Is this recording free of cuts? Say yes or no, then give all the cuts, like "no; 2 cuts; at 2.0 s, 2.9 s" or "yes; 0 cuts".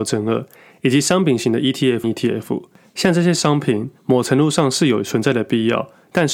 no; 2 cuts; at 2.0 s, 4.0 s